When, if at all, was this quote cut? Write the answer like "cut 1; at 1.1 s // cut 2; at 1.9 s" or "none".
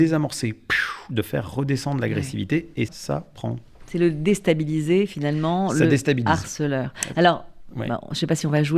cut 1; at 2.9 s